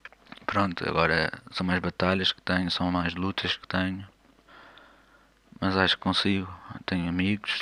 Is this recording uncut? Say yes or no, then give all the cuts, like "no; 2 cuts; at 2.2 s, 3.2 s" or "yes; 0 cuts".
yes; 0 cuts